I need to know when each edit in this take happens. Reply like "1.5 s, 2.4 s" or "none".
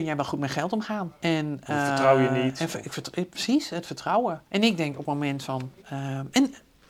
1.2 s, 4.5 s, 5.8 s